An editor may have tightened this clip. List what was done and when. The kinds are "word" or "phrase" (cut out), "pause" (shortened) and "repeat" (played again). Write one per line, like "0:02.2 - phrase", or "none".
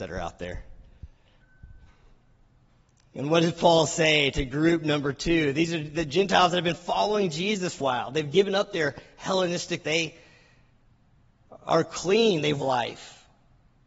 0:02.7 - pause
0:07.8 - word
0:09.8 - word
0:12.6 - phrase